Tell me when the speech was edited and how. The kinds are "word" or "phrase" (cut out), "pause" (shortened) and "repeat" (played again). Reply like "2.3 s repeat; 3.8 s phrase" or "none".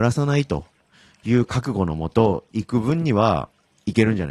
none